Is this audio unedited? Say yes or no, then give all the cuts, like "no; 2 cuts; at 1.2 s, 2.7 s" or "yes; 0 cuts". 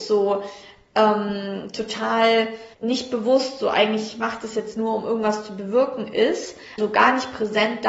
no; 2 cuts; at 2.7 s, 6.8 s